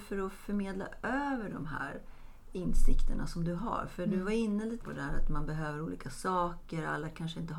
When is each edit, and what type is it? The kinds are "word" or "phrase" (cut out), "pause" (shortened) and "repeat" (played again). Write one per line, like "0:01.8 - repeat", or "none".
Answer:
0:04.8 - word